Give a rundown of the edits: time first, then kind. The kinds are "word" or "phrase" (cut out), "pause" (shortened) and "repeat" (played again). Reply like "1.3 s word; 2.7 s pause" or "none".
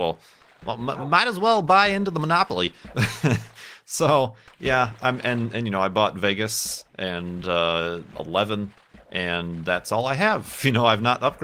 none

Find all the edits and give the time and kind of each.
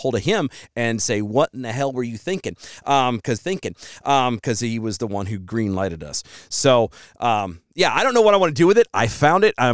3.4 s repeat

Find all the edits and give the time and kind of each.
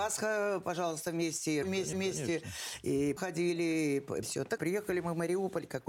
1.6 s word; 1.9 s repeat; 3.2 s phrase; 4.2 s word; 4.6 s word

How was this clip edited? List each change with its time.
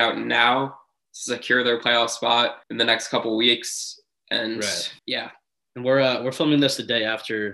2.6 s pause; 5.0 s pause

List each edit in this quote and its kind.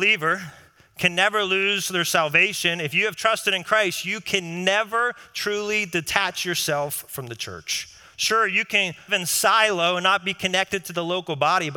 9.1 s word

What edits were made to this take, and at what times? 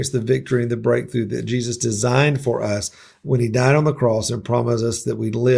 none

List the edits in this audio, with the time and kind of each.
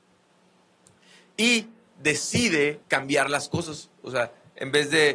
2.8 s pause

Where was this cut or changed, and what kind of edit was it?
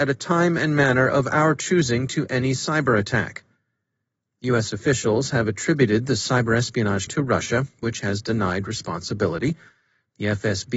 7.1 s word

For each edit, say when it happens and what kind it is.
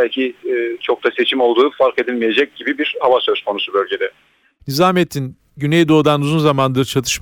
none

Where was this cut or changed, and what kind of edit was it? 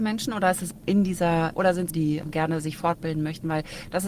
1.5 s phrase; 1.9 s phrase

